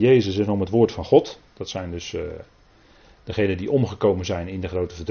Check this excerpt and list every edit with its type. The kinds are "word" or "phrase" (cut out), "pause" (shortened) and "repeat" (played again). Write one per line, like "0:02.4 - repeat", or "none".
none